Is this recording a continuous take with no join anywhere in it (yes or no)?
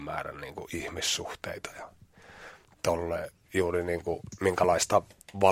yes